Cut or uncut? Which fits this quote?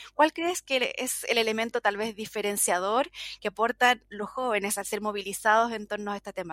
uncut